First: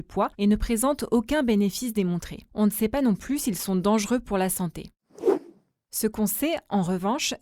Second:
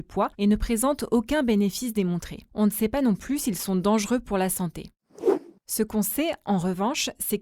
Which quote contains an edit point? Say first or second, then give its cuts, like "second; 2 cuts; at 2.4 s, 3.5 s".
second; 1 cut; at 5.6 s